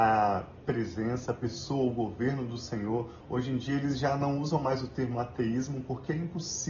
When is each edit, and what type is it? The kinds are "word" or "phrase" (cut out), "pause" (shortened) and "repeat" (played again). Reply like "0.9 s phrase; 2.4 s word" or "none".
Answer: none